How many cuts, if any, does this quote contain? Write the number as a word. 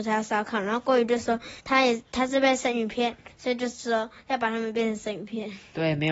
one